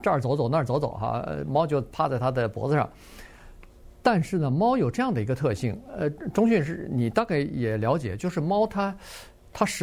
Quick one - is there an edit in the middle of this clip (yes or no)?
no